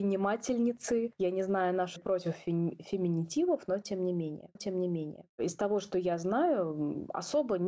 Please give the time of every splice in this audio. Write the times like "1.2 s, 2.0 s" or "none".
2.0 s, 4.6 s